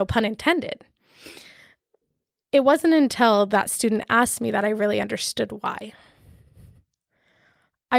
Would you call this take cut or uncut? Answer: uncut